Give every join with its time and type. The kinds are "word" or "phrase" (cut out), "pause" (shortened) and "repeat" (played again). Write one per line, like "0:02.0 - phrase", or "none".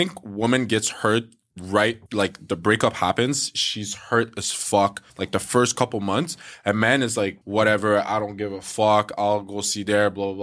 0:02.1 - pause
0:05.1 - pause
0:07.4 - pause